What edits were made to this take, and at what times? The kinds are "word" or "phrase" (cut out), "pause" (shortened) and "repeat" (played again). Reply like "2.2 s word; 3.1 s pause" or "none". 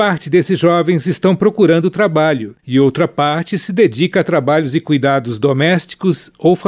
2.6 s pause